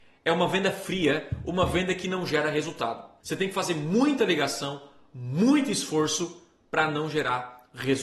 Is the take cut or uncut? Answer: uncut